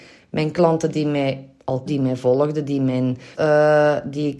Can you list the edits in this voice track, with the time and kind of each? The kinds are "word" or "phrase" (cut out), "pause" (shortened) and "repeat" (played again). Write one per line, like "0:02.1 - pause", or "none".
0:01.9 - word
0:03.3 - word